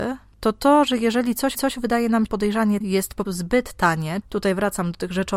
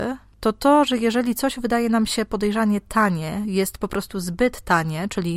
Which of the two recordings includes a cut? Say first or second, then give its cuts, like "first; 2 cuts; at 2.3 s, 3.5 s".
first; 5 cuts; at 1.5 s, 2.3 s, 2.8 s, 3.3 s, 4.2 s